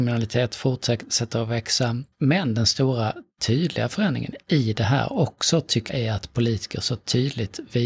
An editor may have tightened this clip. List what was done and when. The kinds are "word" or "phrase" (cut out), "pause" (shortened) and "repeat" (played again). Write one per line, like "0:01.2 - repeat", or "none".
0:02.1 - pause
0:05.9 - word